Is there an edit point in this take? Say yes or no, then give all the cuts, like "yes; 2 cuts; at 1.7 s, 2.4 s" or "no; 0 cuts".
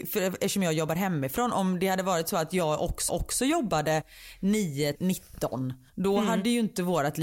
yes; 3 cuts; at 3.1 s, 4.9 s, 5.9 s